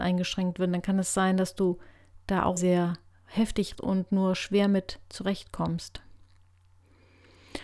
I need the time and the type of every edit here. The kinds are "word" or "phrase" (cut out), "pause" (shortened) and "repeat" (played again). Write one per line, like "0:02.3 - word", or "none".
0:02.6 - word
0:03.7 - word